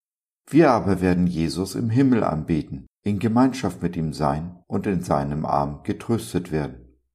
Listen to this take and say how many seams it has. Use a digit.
2